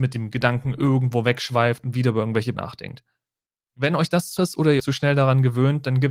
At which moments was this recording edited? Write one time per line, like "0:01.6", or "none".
0:02.5
0:04.4
0:04.8